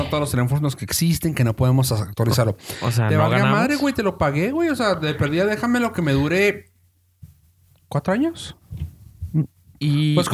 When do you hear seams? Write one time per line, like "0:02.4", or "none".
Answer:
none